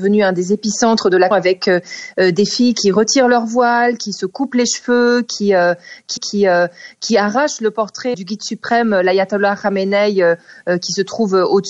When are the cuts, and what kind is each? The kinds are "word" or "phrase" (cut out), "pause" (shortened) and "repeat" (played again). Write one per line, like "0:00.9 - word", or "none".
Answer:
0:01.3 - word
0:06.2 - repeat
0:08.1 - word

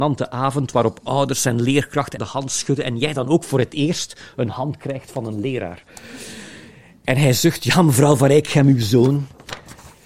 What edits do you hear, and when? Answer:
0:02.2 - word

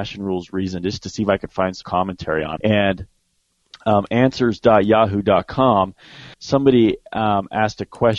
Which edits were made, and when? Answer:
0:01.8 - word
0:02.6 - word
0:06.3 - pause

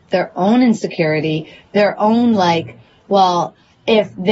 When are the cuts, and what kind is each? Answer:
none

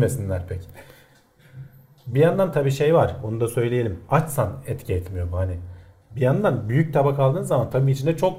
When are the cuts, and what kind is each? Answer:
none

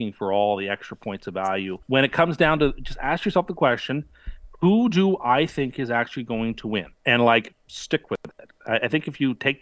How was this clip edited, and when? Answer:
0:01.8 - pause
0:06.9 - pause

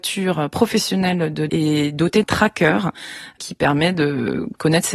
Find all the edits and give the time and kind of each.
0:01.5 - phrase
0:02.2 - word

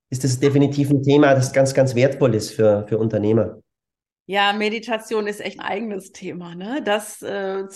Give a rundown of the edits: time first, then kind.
0:05.6 - phrase

